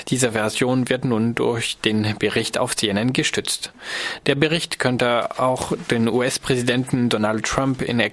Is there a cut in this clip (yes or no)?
no